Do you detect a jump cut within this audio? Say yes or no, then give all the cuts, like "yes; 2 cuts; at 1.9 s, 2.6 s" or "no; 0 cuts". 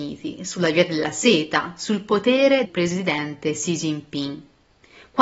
yes; 1 cut; at 2.6 s